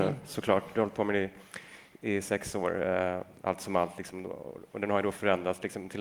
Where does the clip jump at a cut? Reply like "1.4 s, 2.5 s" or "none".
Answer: none